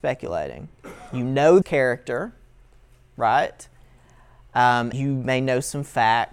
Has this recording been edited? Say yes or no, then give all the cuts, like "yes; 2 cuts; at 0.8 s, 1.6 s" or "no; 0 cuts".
yes; 2 cuts; at 1.6 s, 4.9 s